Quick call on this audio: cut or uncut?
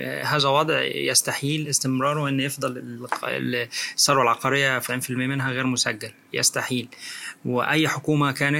cut